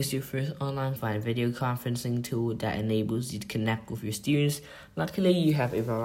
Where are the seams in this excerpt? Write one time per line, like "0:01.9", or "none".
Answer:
0:01.0